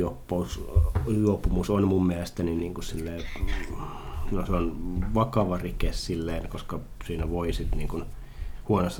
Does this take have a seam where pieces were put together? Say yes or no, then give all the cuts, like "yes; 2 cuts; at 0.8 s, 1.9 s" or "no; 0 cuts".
no; 0 cuts